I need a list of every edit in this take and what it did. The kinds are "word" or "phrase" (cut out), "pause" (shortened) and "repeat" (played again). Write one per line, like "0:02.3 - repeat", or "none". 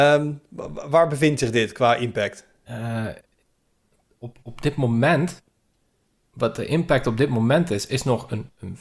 none